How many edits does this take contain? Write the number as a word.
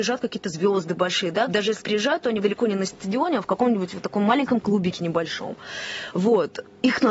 three